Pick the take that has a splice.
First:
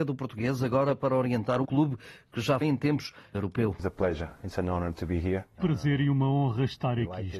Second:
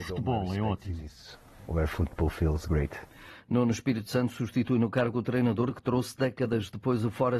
first; 4 cuts; at 1.6 s, 2.6 s, 3.3 s, 5.6 s

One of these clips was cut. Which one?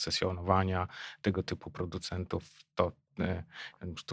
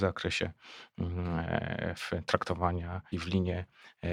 second; 1 cut; at 3.1 s

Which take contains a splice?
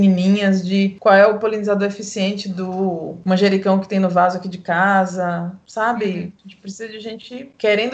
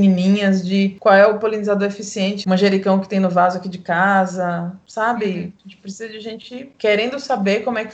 second; 1 cut; at 2.4 s

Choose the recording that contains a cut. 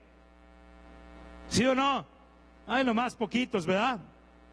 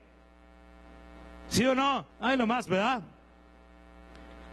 second; 2 cuts; at 2.1 s, 2.7 s

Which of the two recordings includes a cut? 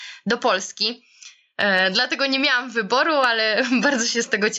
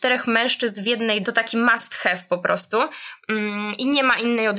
second; 1 cut; at 1.2 s

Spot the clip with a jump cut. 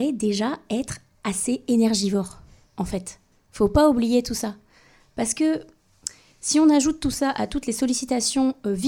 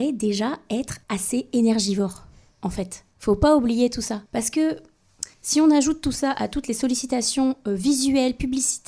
second; 4 cuts; at 1.0 s, 3.1 s, 4.3 s, 5.3 s

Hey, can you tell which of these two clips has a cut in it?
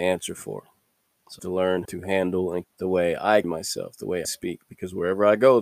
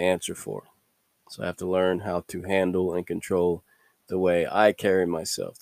first; 5 cuts; at 1.4 s, 1.8 s, 2.6 s, 3.4 s, 4.2 s

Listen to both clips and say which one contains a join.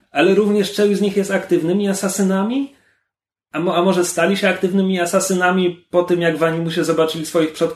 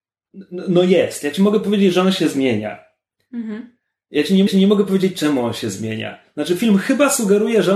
second; 1 cut; at 4.5 s

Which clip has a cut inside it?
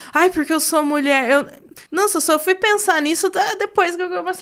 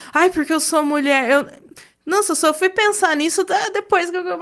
first; 1 cut; at 1.9 s

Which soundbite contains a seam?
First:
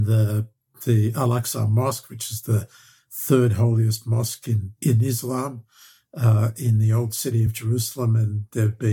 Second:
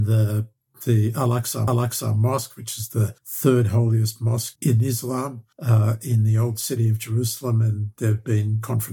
second; 4 cuts; at 1.7 s, 3.2 s, 4.6 s, 5.5 s

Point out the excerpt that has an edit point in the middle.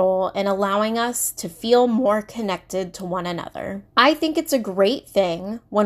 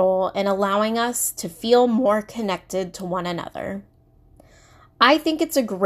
first; 1 cut; at 3.9 s

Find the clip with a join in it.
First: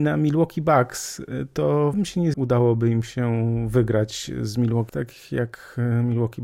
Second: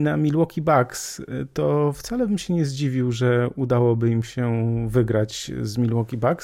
first; 3 cuts; at 1.9 s, 2.3 s, 4.9 s

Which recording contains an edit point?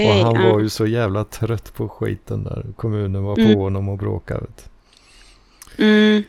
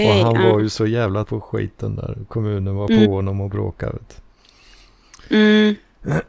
second; 1 cut; at 1.2 s

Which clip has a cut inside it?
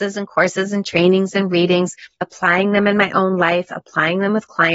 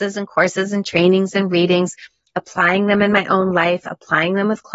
first; 1 cut; at 2.1 s

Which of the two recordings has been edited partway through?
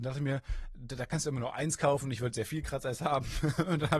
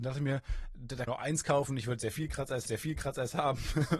second; 2 cuts; at 1.1 s, 2.6 s

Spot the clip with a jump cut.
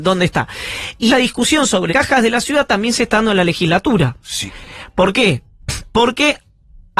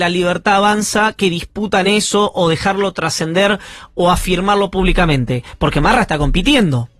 first; 2 cuts; at 1.1 s, 1.9 s

